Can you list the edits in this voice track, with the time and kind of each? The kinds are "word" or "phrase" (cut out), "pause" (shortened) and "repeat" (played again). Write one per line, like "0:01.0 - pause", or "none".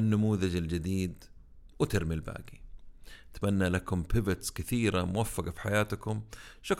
none